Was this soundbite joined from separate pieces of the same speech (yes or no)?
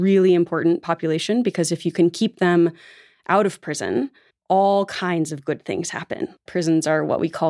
no